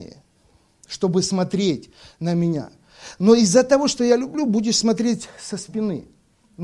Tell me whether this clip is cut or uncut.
uncut